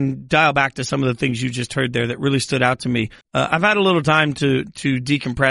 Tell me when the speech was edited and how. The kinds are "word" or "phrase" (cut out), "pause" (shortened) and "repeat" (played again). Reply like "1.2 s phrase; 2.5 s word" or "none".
3.2 s pause